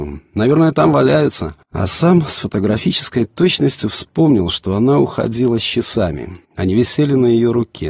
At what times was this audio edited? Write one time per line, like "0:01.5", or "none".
0:01.6
0:06.4